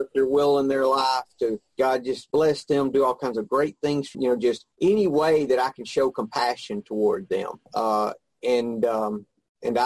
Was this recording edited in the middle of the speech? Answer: yes; 5 cuts; at 1.7 s, 2.3 s, 4.1 s, 4.7 s, 7.7 s

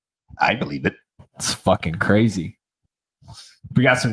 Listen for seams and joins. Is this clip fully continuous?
yes; 0 cuts

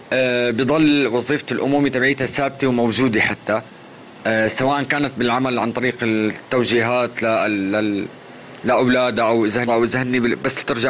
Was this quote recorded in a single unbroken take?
no; 1 cut; at 9.7 s

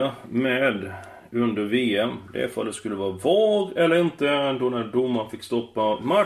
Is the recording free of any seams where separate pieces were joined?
yes; 0 cuts

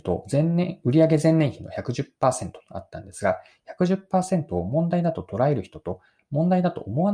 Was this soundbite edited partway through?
no; 0 cuts

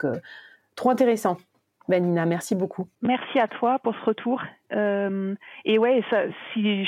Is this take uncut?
yes; 0 cuts

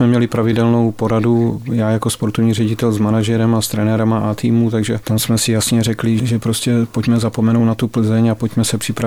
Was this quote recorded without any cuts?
yes; 0 cuts

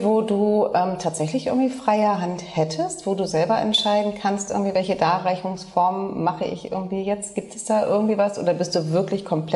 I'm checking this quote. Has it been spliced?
no; 0 cuts

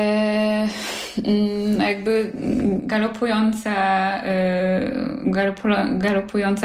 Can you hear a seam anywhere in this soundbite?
no; 0 cuts

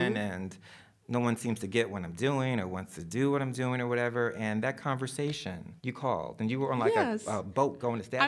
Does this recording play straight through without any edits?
no; 1 cut; at 5.8 s

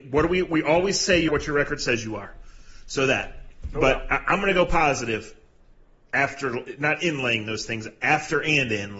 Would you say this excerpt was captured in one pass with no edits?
no; 1 cut; at 1.3 s

